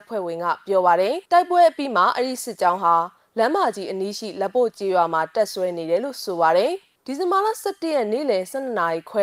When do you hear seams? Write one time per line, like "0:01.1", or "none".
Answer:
0:01.3